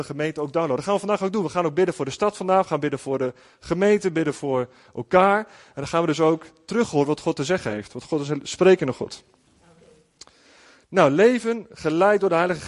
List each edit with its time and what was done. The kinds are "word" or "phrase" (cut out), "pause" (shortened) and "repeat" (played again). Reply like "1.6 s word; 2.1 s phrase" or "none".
none